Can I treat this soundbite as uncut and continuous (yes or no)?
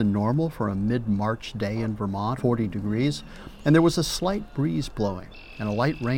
no